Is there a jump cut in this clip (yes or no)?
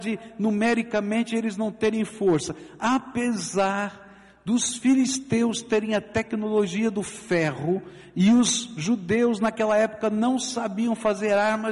no